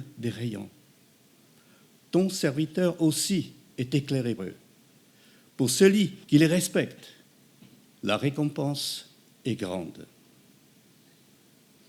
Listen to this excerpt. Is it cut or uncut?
cut